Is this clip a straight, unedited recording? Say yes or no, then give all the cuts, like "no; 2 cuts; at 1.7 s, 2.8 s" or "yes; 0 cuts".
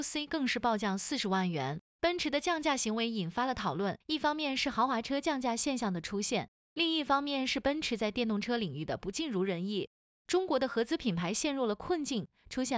no; 2 cuts; at 1.9 s, 4.0 s